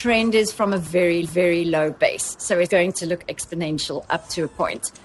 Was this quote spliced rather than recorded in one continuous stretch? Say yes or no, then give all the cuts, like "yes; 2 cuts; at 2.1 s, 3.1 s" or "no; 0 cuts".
yes; 2 cuts; at 1.2 s, 2.7 s